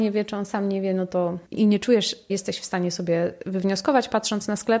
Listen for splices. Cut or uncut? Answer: cut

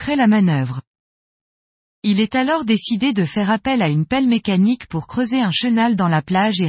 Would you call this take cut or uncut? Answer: uncut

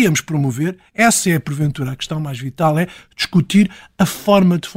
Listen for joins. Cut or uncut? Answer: uncut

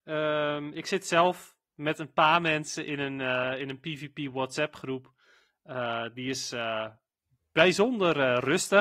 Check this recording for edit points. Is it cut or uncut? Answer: uncut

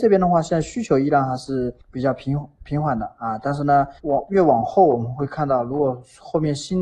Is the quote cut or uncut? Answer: cut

